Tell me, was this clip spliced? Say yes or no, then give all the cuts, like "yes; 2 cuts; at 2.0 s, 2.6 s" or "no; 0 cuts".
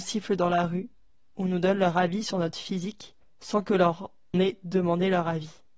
yes; 2 cuts; at 3.2 s, 4.3 s